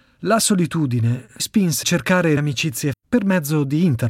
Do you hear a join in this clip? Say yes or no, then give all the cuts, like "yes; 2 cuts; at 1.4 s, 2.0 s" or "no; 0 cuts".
yes; 4 cuts; at 1.4 s, 1.8 s, 2.4 s, 2.9 s